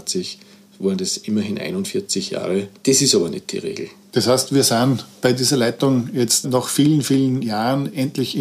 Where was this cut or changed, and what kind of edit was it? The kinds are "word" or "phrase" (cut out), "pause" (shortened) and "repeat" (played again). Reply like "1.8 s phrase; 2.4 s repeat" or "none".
2.8 s pause; 6.4 s word